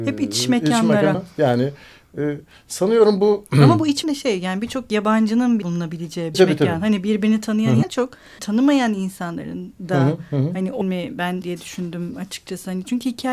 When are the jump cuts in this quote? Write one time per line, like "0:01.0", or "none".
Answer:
0:01.1
0:04.0
0:05.6
0:06.3
0:07.8
0:08.4
0:10.8
0:11.4